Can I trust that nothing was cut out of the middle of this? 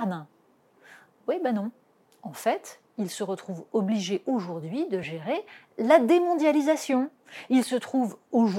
yes; 0 cuts

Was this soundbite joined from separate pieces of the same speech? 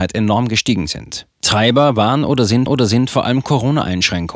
yes; 1 cut; at 2.7 s

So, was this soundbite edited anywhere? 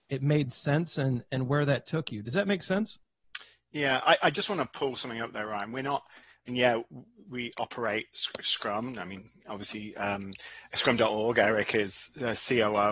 no; 0 cuts

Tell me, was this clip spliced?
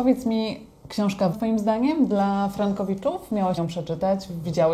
yes; 2 cuts; at 1.3 s, 3.6 s

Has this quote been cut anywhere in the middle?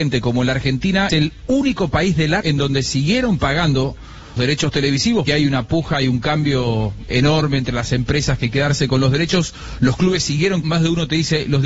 yes; 8 cuts; at 1.1 s, 2.4 s, 2.9 s, 4.4 s, 5.3 s, 7.1 s, 8.5 s, 10.6 s

